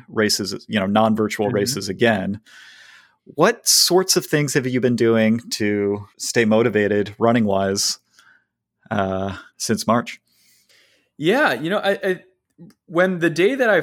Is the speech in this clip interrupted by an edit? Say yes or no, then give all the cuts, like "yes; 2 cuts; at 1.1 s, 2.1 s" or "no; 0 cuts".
yes; 2 cuts; at 6.1 s, 9.5 s